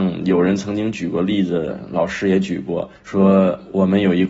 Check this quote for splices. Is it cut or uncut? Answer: cut